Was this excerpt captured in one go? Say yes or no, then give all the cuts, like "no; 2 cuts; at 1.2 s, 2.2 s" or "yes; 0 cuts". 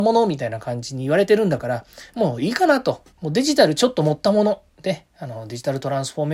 no; 2 cuts; at 3.1 s, 4.7 s